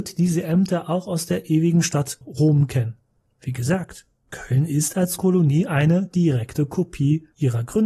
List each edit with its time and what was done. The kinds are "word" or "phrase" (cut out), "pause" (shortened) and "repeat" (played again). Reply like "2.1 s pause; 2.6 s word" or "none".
2.2 s word; 5.2 s word